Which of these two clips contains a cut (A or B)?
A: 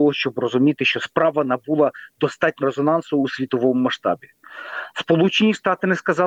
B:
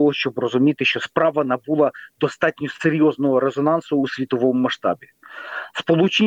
A